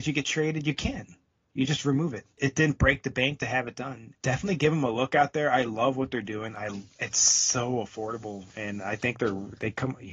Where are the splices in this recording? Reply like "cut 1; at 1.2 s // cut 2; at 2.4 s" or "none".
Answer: cut 1; at 6.9 s